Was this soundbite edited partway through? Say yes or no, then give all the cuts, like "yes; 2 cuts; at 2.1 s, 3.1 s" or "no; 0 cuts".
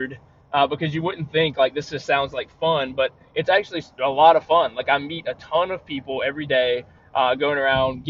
no; 0 cuts